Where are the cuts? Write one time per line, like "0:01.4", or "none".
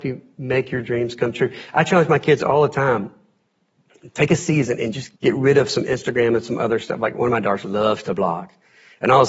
0:05.2